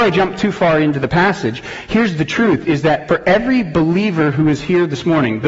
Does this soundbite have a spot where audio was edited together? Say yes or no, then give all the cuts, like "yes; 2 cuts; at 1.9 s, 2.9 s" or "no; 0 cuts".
no; 0 cuts